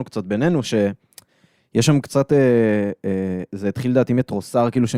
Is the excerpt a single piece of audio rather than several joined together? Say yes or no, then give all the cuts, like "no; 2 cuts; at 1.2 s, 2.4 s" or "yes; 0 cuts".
yes; 0 cuts